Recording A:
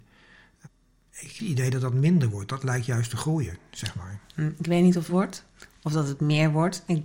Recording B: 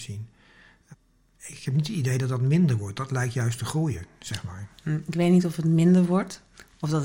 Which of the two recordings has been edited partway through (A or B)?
A